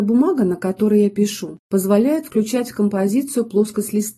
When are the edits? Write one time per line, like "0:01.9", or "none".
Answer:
0:01.6